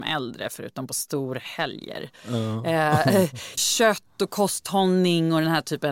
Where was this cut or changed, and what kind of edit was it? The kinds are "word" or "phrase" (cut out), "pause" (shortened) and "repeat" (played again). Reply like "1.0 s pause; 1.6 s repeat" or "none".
3.6 s word